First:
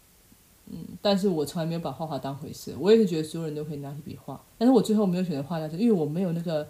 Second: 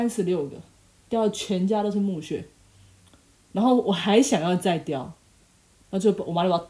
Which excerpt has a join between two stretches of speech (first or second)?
first